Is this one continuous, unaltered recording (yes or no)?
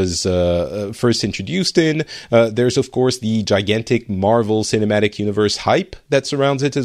yes